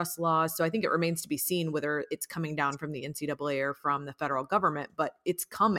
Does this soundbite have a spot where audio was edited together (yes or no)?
no